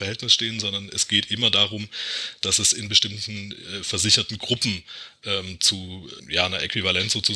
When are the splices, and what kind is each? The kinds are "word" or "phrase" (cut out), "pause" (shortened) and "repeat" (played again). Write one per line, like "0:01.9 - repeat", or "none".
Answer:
none